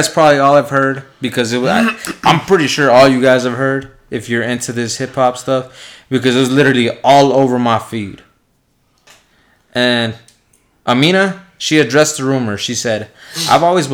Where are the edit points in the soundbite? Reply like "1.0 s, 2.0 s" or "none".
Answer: none